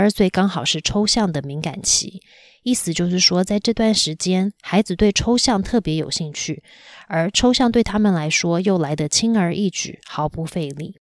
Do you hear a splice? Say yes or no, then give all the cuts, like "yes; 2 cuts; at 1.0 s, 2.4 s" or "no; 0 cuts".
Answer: no; 0 cuts